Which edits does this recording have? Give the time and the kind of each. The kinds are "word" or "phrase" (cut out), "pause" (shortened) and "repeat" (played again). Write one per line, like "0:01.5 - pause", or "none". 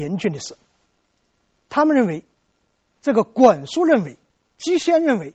0:04.3 - pause